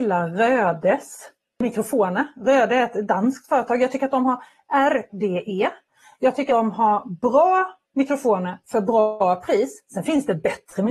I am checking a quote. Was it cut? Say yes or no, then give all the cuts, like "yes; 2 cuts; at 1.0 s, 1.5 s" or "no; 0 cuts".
yes; 3 cuts; at 5.1 s, 6.5 s, 7.8 s